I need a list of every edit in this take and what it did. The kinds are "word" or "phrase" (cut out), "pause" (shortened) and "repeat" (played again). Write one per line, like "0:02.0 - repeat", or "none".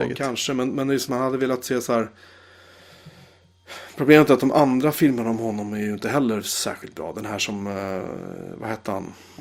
0:01.1 - word